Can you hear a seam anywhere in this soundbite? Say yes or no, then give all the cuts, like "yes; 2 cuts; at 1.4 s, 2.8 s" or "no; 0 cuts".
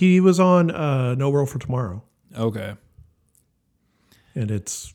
no; 0 cuts